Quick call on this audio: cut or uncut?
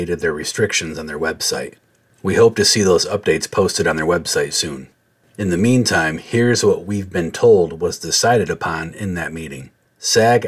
uncut